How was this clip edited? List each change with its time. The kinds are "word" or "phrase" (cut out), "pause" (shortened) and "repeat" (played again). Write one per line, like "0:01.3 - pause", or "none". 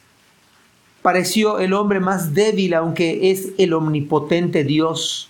none